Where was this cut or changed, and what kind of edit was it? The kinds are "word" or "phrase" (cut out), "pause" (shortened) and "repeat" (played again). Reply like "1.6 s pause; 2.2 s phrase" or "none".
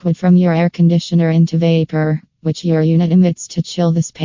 none